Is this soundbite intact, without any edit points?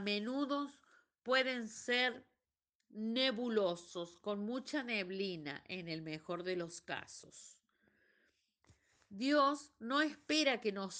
yes; 0 cuts

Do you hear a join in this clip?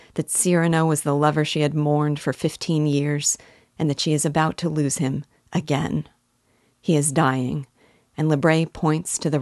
no; 0 cuts

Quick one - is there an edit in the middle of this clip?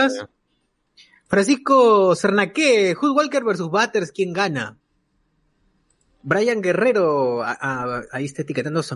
no; 0 cuts

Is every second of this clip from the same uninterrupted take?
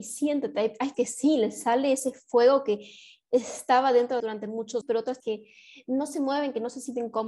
no; 4 cuts; at 0.9 s, 4.2 s, 4.8 s, 5.2 s

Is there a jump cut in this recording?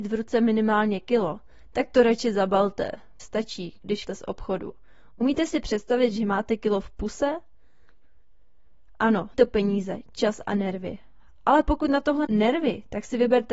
yes; 4 cuts; at 3.2 s, 4.1 s, 9.3 s, 12.2 s

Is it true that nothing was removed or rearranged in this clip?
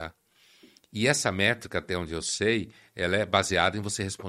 yes; 0 cuts

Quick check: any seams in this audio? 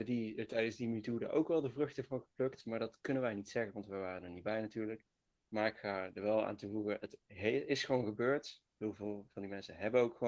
no; 0 cuts

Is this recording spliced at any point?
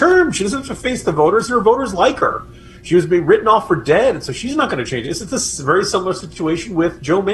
no; 0 cuts

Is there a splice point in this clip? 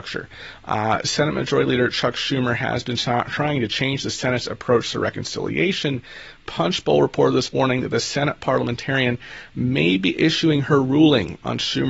no; 0 cuts

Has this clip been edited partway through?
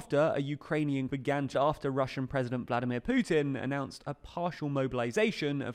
yes; 2 cuts; at 1.1 s, 1.5 s

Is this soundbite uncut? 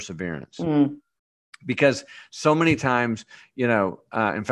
yes; 0 cuts

